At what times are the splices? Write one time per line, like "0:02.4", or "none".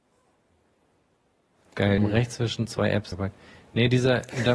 0:02.0
0:03.1